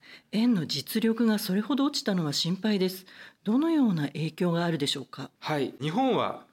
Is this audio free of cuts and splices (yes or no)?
no